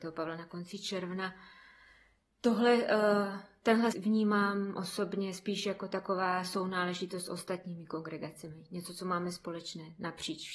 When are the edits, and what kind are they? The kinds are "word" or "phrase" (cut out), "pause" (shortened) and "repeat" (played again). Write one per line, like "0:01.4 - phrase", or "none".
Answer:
0:03.9 - word